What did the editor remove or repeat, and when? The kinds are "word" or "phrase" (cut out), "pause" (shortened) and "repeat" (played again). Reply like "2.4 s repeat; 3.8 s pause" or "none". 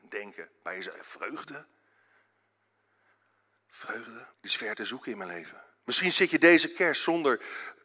4.3 s pause